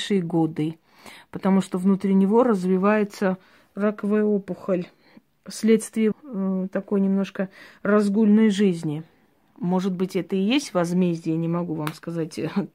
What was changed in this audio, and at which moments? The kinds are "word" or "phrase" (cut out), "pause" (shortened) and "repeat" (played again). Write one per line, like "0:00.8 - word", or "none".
0:06.1 - word